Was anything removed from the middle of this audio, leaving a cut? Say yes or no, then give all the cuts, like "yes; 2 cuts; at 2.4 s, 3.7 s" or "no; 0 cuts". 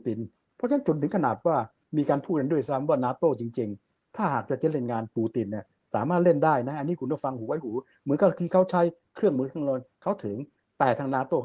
no; 0 cuts